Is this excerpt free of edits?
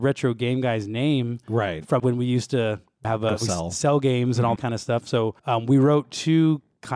no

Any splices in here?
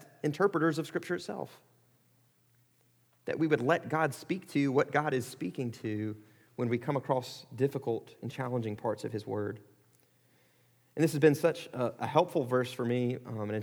no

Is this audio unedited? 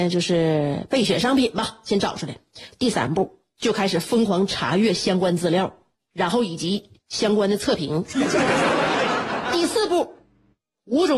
no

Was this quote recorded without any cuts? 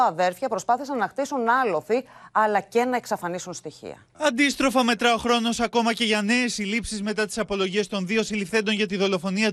no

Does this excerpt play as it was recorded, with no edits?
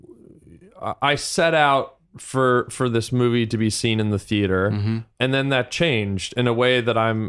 yes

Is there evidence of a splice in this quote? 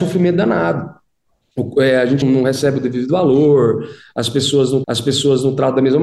yes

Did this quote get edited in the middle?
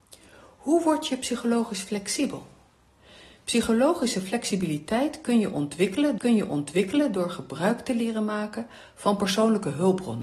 yes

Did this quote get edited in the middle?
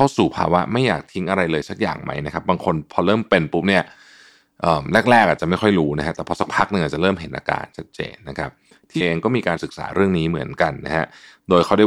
yes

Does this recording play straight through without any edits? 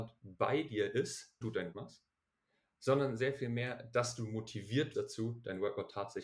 no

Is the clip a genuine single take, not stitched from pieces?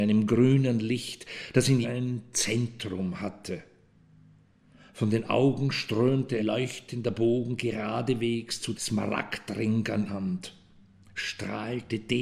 no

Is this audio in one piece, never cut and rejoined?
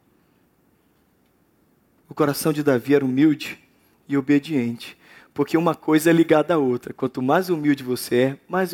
yes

